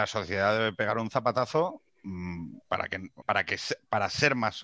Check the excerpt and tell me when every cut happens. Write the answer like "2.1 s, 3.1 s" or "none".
2.6 s, 3.2 s